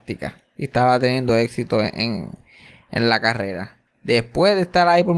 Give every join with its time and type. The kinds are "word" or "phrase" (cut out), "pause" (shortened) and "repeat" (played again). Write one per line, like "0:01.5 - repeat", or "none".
none